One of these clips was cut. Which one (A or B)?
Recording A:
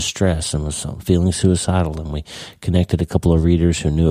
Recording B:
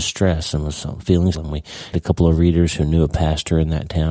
B